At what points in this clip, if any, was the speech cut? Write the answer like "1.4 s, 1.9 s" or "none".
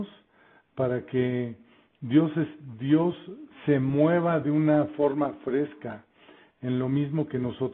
none